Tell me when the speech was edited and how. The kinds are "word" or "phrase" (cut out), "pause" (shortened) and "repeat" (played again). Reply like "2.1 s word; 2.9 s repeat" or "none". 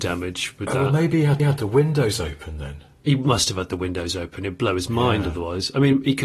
1.4 s repeat